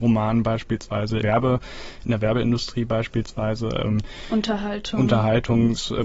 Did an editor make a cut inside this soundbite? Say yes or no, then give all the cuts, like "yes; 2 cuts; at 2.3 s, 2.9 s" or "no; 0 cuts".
yes; 1 cut; at 1.2 s